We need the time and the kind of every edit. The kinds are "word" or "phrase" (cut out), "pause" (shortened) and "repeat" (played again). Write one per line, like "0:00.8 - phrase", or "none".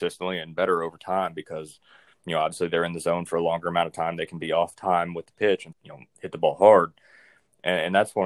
0:05.7 - word